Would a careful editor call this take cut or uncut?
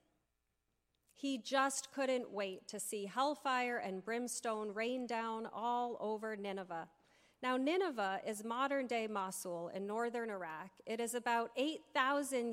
uncut